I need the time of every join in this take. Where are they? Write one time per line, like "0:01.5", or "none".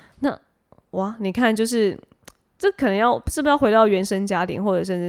none

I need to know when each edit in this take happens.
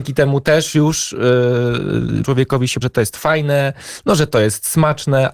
0:02.2
0:02.8

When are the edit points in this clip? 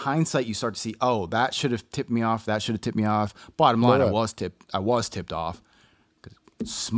none

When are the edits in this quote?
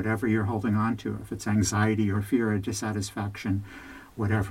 0:02.1

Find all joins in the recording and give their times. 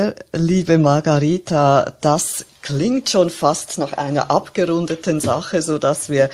none

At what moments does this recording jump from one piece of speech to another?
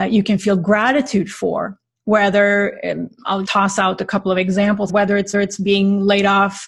0:02.0
0:03.4
0:04.9
0:05.3

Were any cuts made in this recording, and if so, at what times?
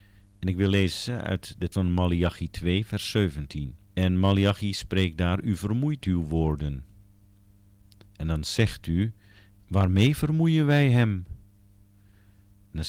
0:01.7
0:03.8
0:06.0

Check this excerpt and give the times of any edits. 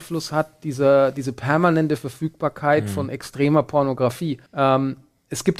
0:04.5

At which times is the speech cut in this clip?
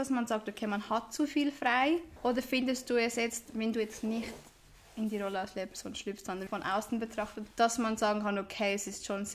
0:02.2
0:06.5
0:07.5

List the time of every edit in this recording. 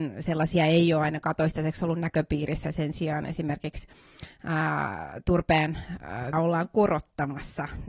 0:06.3

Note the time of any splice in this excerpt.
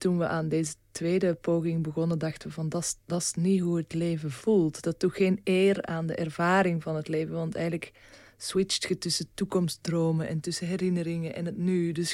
none

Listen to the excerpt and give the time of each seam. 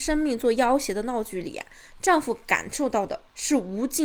none

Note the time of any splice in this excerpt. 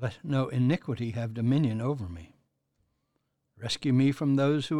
none

